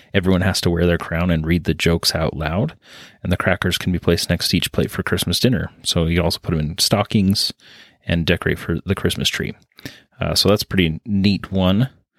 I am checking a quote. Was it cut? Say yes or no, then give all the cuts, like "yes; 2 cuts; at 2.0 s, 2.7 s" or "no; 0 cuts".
no; 0 cuts